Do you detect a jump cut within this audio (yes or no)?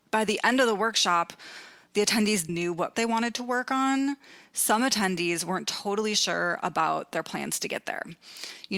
yes